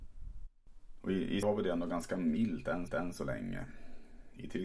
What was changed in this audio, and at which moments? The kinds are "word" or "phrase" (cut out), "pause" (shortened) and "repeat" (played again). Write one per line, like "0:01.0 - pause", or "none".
0:01.4 - word
0:02.9 - repeat